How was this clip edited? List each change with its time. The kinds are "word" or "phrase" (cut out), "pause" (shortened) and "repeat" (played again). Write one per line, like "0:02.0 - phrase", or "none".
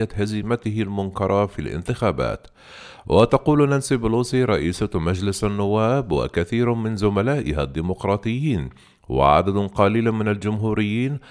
none